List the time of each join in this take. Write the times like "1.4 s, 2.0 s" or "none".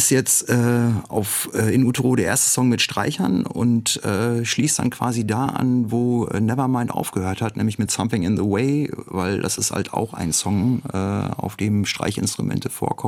none